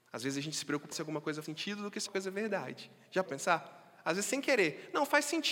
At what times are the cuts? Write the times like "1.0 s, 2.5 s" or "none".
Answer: 0.9 s, 1.4 s, 2.1 s, 3.2 s